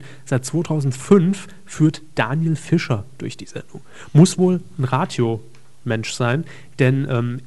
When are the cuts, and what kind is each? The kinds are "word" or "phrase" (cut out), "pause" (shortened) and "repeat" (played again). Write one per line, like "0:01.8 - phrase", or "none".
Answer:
none

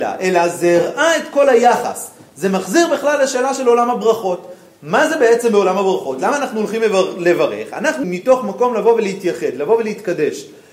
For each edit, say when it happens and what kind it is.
0:08.0 - word

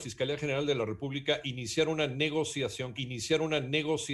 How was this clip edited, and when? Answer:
0:03.0 - repeat

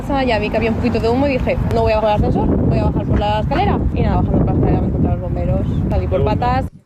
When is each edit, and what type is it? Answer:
0:02.0 - word
0:04.1 - word

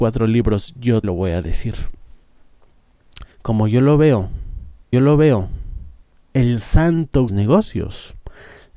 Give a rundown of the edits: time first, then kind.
0:01.0 - word
0:03.3 - pause
0:04.9 - repeat
0:07.3 - phrase

